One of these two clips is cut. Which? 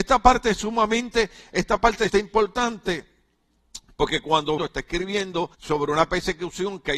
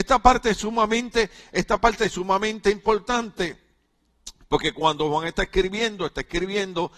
first; 3 cuts; at 2.1 s, 4.6 s, 5.5 s

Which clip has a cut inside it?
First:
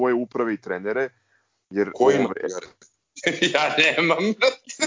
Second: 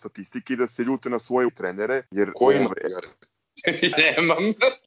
second; 3 cuts; at 1.5 s, 2.1 s, 3.9 s

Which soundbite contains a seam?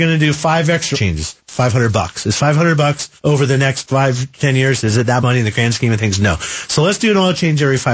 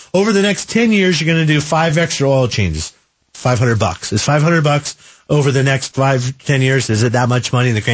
first; 4 cuts; at 0.9 s, 1.4 s, 3.2 s, 5.2 s

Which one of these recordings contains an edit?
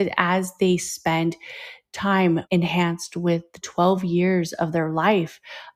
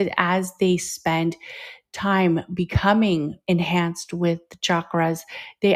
first; 2 cuts; at 2.4 s, 3.6 s

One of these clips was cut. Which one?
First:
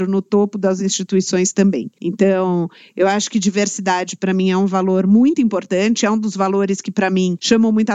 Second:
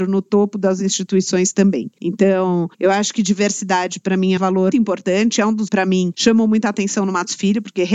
second; 4 cuts; at 2.7 s, 4.4 s, 4.7 s, 5.7 s

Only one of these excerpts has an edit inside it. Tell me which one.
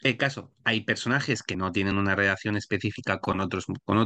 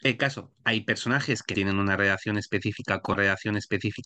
second; 2 cuts; at 1.5 s, 3.2 s

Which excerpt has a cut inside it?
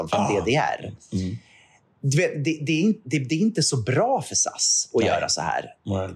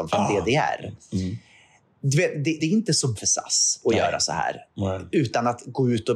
second; 2 cuts; at 2.6 s, 3.2 s

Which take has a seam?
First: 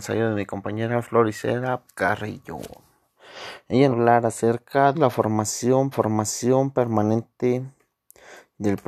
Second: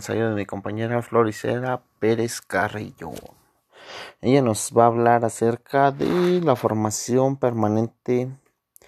first; 4 cuts; at 1.9 s, 3.9 s, 4.9 s, 5.9 s

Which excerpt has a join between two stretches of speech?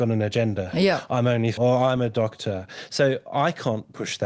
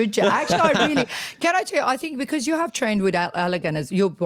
first; 1 cut; at 1.6 s

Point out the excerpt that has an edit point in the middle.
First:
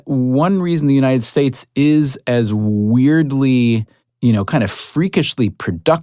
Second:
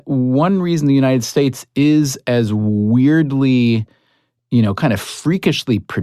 first; 1 cut; at 4.0 s

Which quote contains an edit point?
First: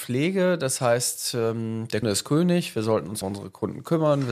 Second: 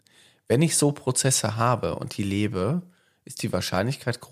first; 2 cuts; at 2.0 s, 3.2 s

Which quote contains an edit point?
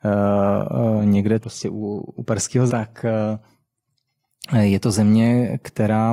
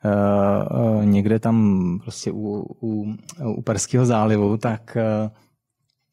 first; 3 cuts; at 1.4 s, 2.2 s, 2.7 s

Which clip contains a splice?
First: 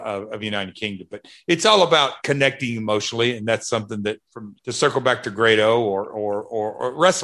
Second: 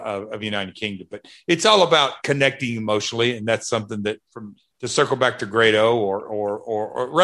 first; 1 cut; at 4.6 s

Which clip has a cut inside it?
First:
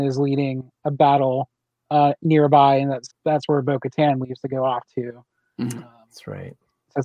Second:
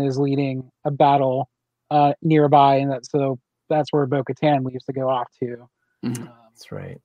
first; 1 cut; at 3.1 s

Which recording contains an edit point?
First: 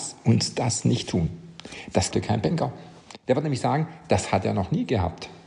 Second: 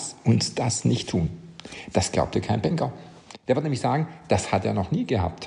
first; 1 cut; at 2.1 s

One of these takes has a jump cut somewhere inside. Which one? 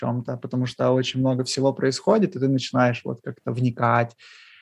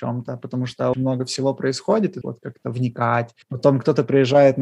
second; 3 cuts; at 0.9 s, 2.2 s, 3.4 s

